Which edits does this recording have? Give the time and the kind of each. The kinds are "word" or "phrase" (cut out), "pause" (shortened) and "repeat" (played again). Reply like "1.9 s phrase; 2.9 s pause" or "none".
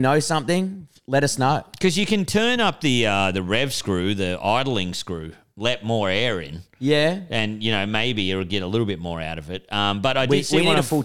none